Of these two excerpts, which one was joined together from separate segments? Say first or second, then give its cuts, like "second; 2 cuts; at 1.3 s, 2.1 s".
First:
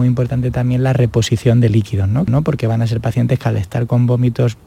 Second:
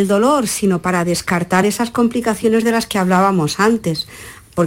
first; 1 cut; at 2.3 s